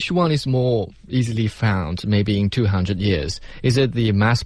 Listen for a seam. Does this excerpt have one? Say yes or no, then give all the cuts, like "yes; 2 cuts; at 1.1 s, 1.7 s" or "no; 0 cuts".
no; 0 cuts